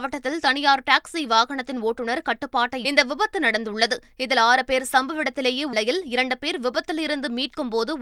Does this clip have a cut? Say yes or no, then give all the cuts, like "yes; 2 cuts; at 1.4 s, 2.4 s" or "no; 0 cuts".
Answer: yes; 2 cuts; at 2.8 s, 5.7 s